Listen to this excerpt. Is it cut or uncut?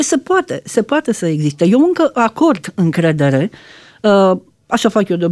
uncut